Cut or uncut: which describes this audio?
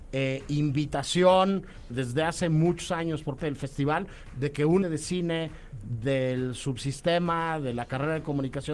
cut